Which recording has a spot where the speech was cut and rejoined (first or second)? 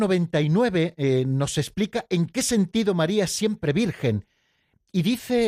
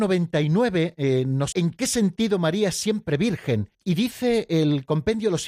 second